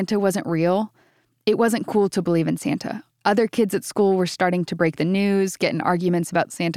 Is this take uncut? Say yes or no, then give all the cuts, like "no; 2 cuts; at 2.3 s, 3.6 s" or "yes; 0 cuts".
yes; 0 cuts